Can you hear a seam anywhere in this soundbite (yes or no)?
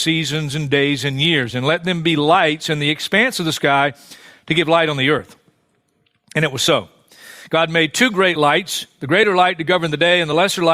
no